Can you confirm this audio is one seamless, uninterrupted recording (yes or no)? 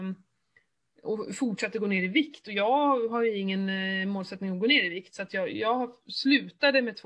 yes